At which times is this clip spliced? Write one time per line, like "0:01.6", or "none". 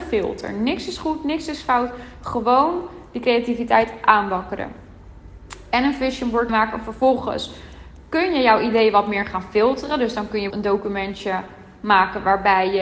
0:06.5
0:10.5